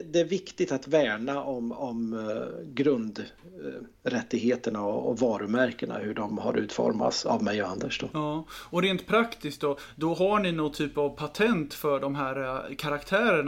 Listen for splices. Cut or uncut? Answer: uncut